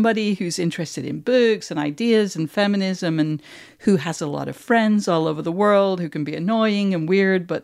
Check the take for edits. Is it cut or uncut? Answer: uncut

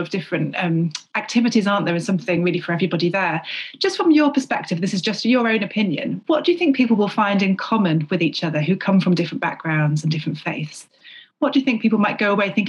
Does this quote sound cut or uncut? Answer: uncut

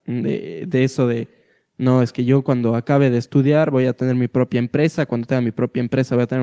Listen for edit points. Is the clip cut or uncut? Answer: uncut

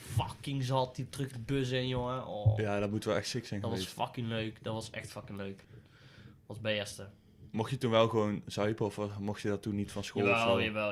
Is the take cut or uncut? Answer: cut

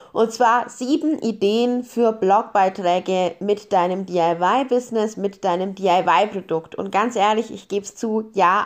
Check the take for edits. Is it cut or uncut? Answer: uncut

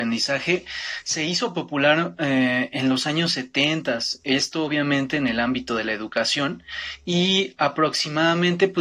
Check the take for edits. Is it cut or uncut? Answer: uncut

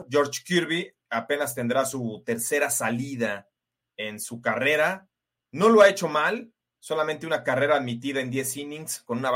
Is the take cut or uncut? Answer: uncut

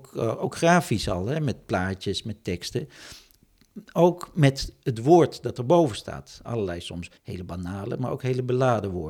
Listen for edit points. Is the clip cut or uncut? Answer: cut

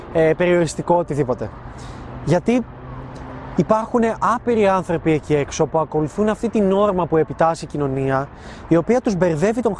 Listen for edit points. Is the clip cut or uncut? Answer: uncut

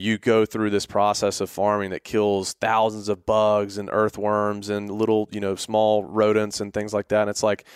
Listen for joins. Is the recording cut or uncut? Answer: uncut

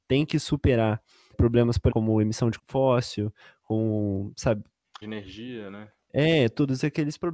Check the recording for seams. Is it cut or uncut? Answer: cut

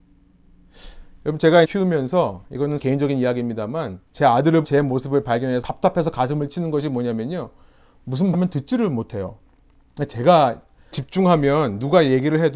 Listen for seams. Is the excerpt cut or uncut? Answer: cut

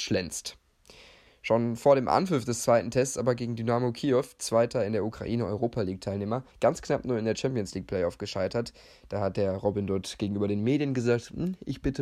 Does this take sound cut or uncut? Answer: cut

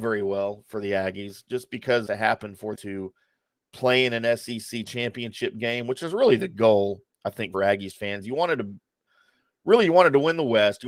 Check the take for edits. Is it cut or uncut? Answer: cut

